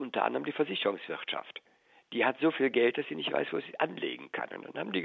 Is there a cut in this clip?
no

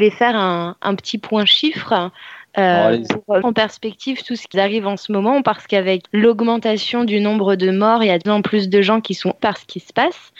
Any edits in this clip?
yes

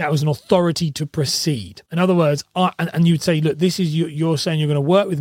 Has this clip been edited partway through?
yes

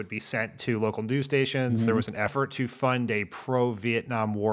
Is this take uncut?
yes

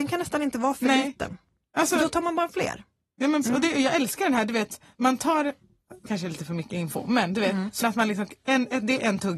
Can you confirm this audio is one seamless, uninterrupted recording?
no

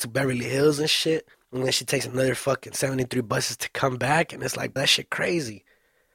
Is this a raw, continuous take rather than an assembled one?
no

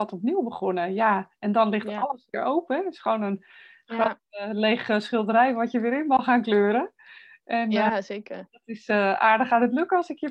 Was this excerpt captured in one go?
yes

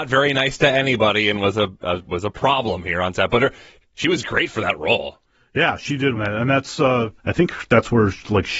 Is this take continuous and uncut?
no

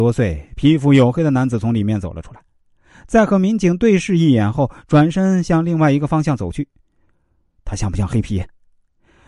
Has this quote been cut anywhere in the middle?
no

